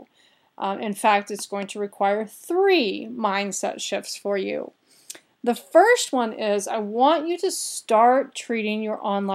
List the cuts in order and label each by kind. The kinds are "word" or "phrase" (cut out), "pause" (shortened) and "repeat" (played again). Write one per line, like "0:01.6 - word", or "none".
none